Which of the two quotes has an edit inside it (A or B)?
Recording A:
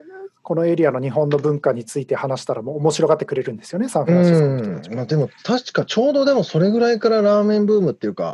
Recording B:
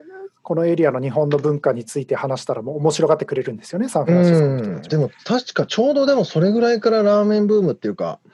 B